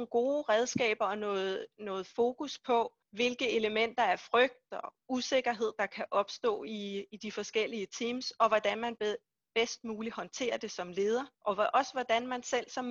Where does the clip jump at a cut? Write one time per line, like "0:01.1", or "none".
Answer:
0:03.0
0:11.3